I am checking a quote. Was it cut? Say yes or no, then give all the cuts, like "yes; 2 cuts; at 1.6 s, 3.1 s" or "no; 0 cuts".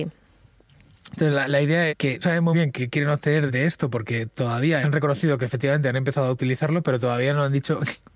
yes; 5 cuts; at 1.9 s, 2.2 s, 2.5 s, 3.5 s, 4.8 s